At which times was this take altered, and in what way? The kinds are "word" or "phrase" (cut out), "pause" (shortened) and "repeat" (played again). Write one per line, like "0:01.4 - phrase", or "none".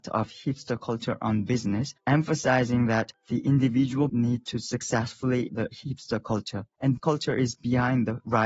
0:04.1 - word
0:05.5 - word
0:07.0 - word